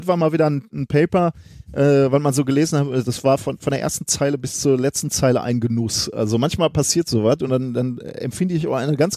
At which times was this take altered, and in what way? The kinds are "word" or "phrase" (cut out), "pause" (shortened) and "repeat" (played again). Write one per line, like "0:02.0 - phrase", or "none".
none